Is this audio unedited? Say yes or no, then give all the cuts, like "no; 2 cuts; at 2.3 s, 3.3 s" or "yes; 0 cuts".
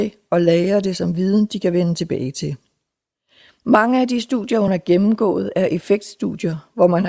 yes; 0 cuts